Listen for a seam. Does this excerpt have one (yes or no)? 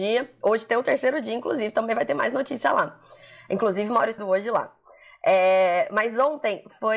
yes